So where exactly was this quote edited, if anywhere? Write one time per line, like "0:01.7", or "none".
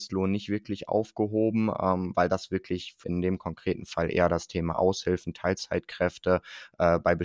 0:03.0